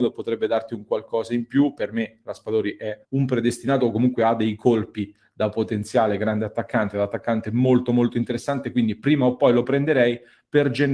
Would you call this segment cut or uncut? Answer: cut